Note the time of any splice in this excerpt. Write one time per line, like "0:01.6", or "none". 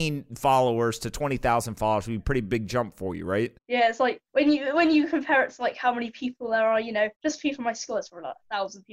0:03.6
0:04.3
0:07.1